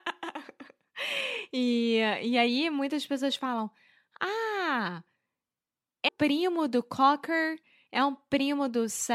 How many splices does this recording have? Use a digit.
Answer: 1